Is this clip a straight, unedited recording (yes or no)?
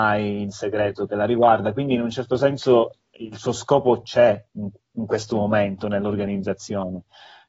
yes